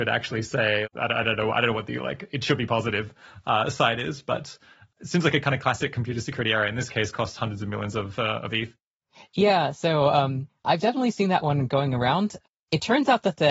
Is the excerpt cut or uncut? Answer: uncut